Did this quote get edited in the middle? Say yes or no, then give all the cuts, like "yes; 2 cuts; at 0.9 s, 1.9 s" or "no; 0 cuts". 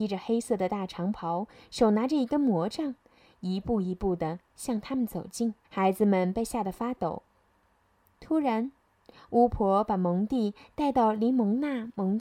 yes; 1 cut; at 5.6 s